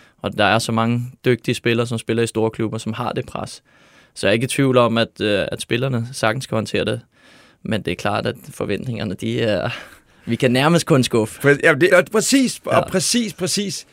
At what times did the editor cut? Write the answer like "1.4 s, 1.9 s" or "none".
11.9 s